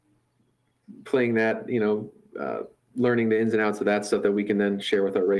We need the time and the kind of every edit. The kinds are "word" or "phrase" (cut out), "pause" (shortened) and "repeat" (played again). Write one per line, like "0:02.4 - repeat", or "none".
none